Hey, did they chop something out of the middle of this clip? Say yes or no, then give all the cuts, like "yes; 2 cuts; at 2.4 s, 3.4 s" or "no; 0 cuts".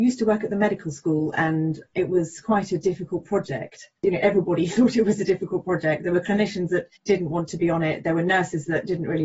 yes; 2 cuts; at 4.0 s, 7.0 s